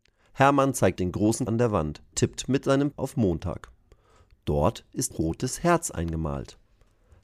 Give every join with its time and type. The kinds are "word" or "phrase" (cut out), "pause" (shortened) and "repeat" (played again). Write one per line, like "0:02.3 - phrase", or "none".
0:01.0 - word
0:01.5 - word
0:02.1 - word
0:02.9 - word
0:05.1 - word